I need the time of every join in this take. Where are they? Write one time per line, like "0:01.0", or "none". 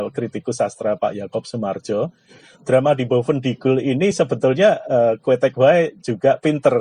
none

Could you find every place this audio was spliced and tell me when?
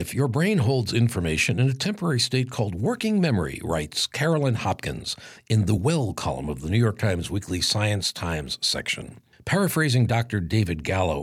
none

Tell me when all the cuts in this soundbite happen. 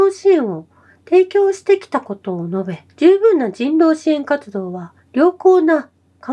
none

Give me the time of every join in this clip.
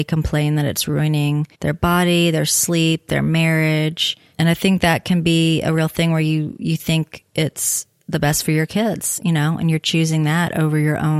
0:01.5

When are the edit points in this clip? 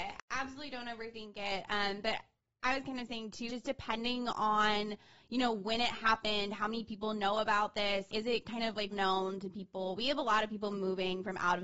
0:03.5
0:08.1
0:08.9

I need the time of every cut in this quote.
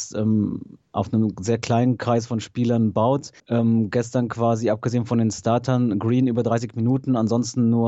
0:03.4

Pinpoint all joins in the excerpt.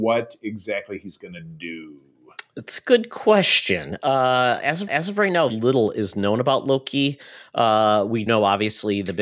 0:04.9
0:05.5
0:08.3

